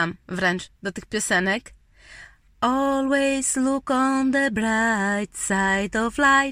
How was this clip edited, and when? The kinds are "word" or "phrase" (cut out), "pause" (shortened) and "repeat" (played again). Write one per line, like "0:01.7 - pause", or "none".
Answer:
0:02.5 - pause